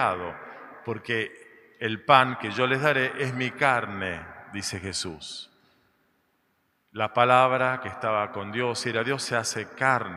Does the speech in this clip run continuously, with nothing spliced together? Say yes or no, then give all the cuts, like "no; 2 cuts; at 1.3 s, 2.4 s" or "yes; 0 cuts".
yes; 0 cuts